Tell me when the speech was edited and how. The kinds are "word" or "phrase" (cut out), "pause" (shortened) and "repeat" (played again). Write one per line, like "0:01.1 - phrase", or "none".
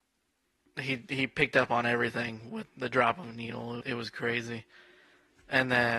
0:02.7 - word
0:03.8 - word